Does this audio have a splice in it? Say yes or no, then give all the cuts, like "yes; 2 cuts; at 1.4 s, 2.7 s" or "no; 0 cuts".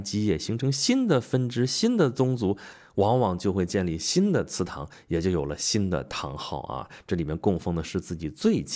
no; 0 cuts